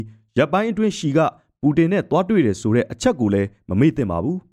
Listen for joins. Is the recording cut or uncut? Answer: uncut